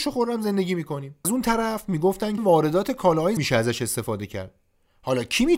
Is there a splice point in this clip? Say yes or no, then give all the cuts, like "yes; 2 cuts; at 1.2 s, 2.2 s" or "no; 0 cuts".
yes; 3 cuts; at 1.2 s, 2.4 s, 3.4 s